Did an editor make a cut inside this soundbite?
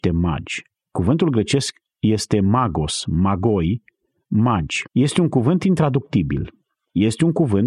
yes; 1 cut; at 4.9 s

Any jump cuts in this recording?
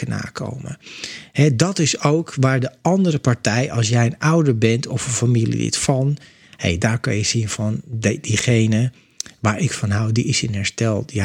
no; 0 cuts

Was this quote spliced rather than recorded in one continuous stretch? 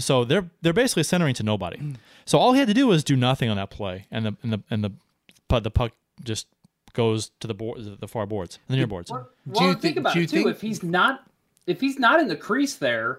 no; 0 cuts

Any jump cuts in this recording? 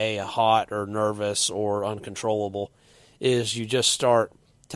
no; 0 cuts

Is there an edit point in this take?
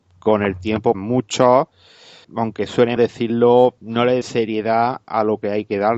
yes; 5 cuts; at 0.9 s, 2.2 s, 3.0 s, 3.8 s, 4.2 s

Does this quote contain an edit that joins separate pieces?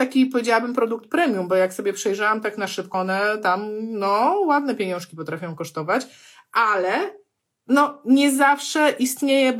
yes; 1 cut; at 2.9 s

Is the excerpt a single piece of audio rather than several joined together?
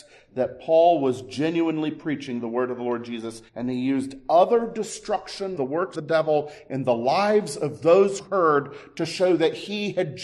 no; 4 cuts; at 3.5 s, 5.6 s, 5.9 s, 8.2 s

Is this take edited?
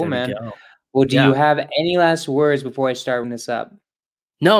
yes; 1 cut; at 3.2 s

